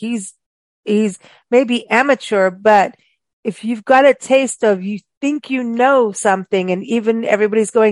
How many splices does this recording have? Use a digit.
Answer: 0